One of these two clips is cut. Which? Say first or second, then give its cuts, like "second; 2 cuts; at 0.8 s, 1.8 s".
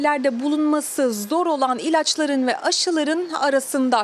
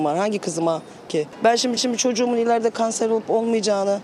second; 2 cuts; at 1.1 s, 1.8 s